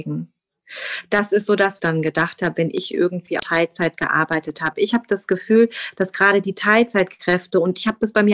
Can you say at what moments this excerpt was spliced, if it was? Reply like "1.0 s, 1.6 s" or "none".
1.8 s, 3.4 s